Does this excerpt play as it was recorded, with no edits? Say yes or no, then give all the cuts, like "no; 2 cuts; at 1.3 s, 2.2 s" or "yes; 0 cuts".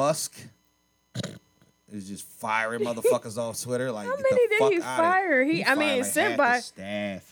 yes; 0 cuts